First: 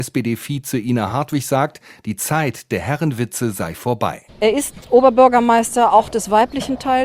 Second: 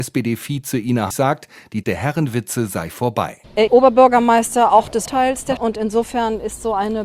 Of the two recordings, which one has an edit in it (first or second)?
second